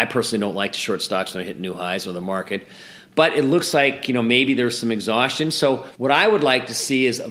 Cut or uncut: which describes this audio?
cut